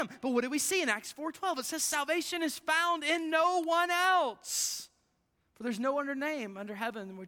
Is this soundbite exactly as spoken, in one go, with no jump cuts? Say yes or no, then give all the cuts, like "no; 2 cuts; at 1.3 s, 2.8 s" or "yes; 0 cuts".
yes; 0 cuts